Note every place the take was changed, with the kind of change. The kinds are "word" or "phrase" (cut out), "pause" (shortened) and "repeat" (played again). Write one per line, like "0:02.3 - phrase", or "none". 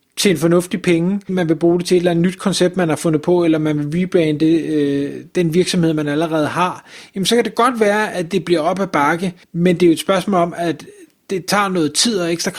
0:01.3 - word
0:09.4 - pause